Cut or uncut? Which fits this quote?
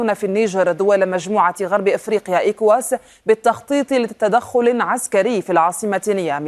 uncut